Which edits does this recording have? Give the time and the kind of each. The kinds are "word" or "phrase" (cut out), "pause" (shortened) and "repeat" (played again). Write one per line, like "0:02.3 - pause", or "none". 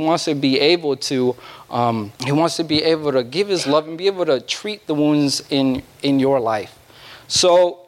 0:02.1 - pause
0:05.9 - pause